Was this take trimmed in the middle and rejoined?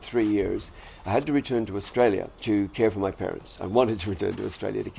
yes; 1 cut; at 2.3 s

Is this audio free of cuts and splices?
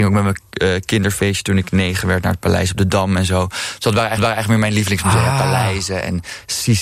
no; 1 cut; at 4.2 s

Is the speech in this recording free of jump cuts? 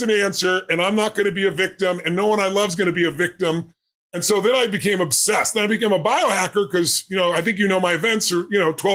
yes; 0 cuts

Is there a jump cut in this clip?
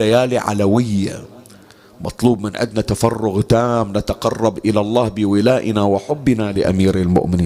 no; 0 cuts

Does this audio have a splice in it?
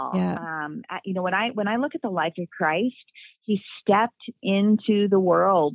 no; 0 cuts

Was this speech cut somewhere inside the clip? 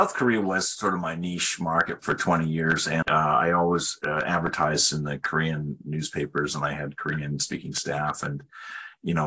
yes; 2 cuts; at 2.0 s, 3.0 s

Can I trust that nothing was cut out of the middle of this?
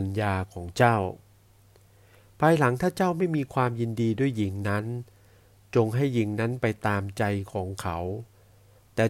yes; 0 cuts

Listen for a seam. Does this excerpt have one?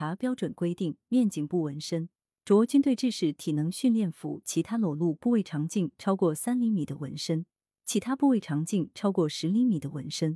no; 0 cuts

